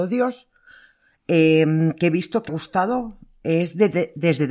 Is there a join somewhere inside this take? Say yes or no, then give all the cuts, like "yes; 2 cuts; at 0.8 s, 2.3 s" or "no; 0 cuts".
yes; 1 cut; at 2.5 s